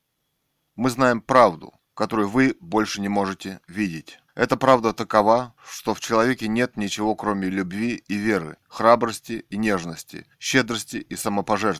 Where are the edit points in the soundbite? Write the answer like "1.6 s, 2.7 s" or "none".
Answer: 1.8 s, 4.3 s, 5.6 s, 8.6 s, 10.3 s